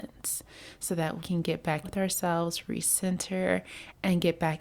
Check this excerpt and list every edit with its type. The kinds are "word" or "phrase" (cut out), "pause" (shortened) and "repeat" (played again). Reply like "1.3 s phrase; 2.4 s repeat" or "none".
1.2 s word; 1.8 s phrase